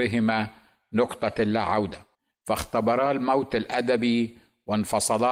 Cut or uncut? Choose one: cut